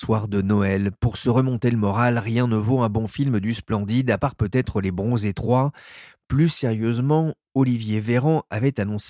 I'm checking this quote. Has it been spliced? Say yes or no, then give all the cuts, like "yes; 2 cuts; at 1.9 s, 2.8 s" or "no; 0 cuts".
no; 0 cuts